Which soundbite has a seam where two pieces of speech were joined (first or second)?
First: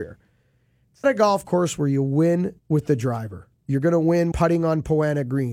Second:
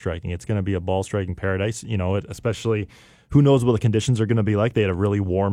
first